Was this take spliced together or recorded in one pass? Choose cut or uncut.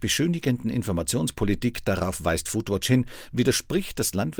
uncut